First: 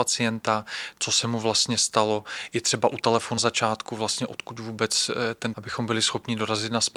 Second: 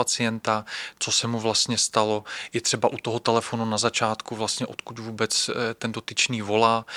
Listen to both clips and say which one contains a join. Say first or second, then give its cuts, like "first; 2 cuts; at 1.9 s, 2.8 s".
first; 3 cuts; at 3.0 s, 3.4 s, 5.5 s